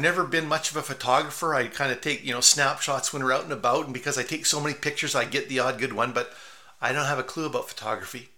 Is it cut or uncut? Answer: uncut